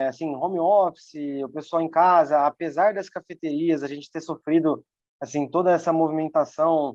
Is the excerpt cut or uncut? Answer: uncut